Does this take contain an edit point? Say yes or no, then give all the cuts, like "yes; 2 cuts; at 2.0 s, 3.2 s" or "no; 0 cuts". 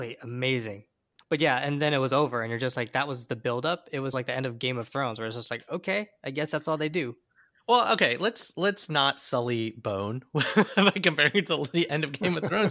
no; 0 cuts